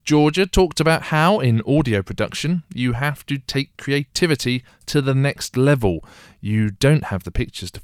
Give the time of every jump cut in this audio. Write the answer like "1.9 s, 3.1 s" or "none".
none